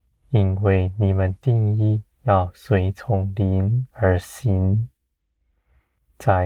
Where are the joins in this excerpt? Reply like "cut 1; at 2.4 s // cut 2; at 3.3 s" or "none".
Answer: cut 1; at 2.1 s // cut 2; at 3.9 s